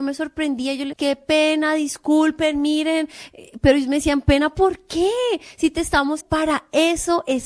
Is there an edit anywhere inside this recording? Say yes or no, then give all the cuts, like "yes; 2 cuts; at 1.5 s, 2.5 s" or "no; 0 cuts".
yes; 2 cuts; at 0.9 s, 6.2 s